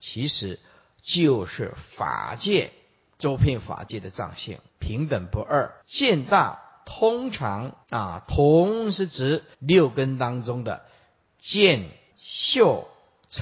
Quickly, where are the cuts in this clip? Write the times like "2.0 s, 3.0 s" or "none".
4.7 s, 5.8 s, 7.8 s, 9.5 s, 12.1 s

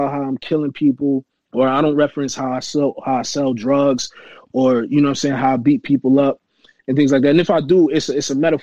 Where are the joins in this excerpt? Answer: 1.4 s

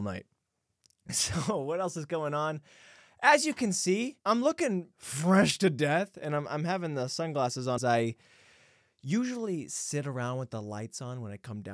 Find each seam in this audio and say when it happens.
4.2 s, 4.9 s, 7.8 s

